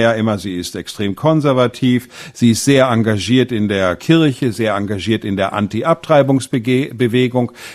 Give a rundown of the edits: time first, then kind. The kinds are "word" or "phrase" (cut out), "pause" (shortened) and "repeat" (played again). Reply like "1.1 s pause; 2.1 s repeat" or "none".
4.0 s word